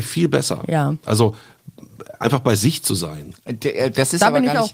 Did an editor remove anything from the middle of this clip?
no; 0 cuts

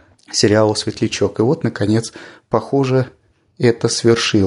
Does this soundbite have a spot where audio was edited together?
no; 0 cuts

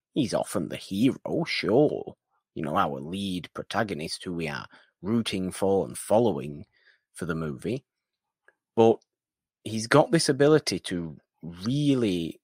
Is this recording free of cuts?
yes; 0 cuts

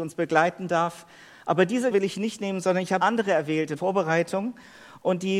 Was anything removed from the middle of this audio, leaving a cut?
yes; 3 cuts; at 1.9 s, 3.0 s, 3.8 s

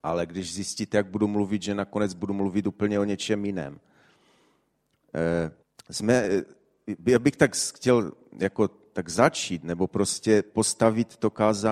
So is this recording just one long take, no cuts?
no; 1 cut; at 5.6 s

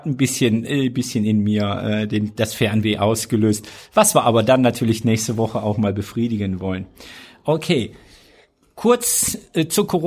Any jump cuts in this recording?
no; 0 cuts

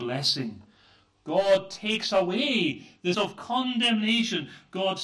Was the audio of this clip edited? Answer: yes; 1 cut; at 3.1 s

